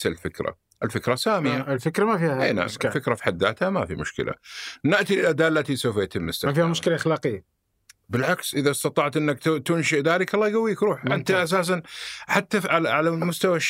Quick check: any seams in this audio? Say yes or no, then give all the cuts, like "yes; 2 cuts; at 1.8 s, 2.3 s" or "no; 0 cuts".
no; 0 cuts